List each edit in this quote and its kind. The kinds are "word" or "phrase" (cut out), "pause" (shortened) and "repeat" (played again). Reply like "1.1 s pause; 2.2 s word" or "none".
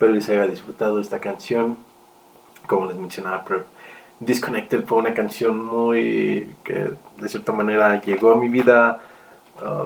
none